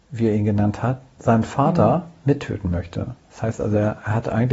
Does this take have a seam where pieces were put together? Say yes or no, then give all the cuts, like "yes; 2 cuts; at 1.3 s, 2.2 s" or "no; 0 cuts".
no; 0 cuts